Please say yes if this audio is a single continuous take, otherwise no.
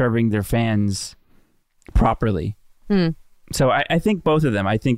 yes